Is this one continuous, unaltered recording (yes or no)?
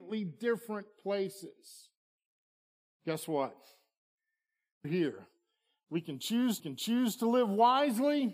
no